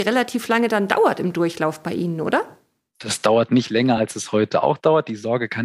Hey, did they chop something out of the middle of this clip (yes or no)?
no